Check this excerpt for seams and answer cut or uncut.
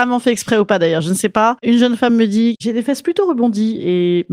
uncut